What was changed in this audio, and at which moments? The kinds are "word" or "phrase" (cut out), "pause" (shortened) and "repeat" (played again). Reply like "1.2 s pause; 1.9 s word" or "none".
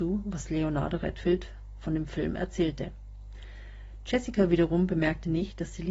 none